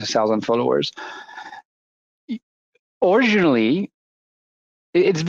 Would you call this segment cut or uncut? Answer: uncut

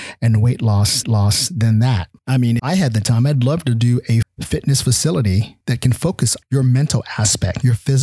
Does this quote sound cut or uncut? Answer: cut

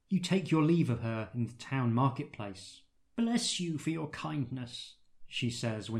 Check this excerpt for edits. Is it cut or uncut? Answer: uncut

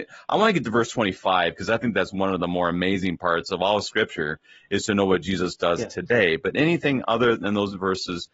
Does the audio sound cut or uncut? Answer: uncut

